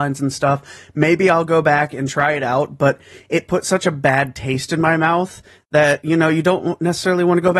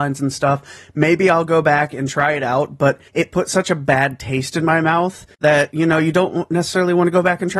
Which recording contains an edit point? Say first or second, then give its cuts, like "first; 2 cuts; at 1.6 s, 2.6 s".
second; 2 cuts; at 3.1 s, 5.3 s